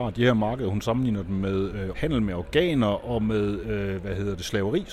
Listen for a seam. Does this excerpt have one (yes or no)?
yes